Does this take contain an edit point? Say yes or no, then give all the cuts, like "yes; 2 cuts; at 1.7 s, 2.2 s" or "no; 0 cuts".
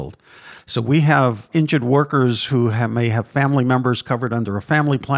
no; 0 cuts